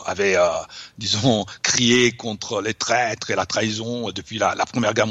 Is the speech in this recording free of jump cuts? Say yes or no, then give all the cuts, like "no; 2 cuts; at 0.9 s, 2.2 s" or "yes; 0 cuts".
yes; 0 cuts